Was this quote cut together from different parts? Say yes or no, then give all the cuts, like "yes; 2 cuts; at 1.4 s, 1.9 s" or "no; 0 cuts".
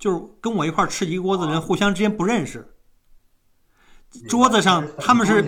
no; 0 cuts